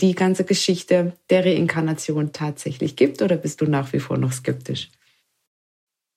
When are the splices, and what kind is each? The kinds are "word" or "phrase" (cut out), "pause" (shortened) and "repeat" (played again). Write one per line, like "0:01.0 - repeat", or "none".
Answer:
none